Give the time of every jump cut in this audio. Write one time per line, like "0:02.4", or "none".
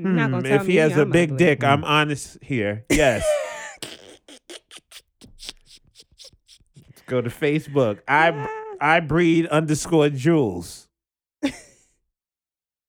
none